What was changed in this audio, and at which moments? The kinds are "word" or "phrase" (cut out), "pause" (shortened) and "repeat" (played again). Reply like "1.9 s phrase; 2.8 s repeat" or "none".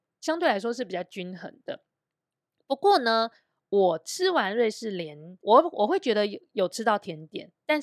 5.4 s pause